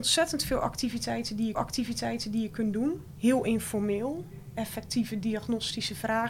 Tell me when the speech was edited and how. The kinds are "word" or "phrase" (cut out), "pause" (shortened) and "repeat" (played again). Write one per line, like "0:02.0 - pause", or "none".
0:01.5 - repeat